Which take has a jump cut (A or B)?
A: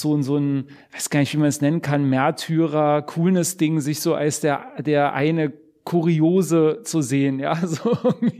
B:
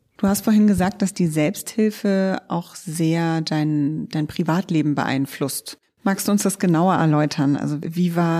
B